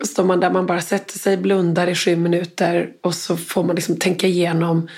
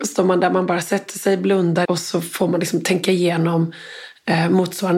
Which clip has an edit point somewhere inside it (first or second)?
second